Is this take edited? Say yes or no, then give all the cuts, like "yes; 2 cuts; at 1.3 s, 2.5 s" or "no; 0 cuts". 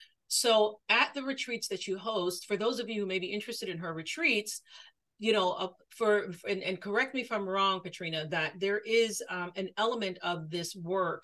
no; 0 cuts